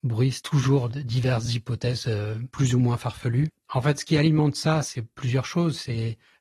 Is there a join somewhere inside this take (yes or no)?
no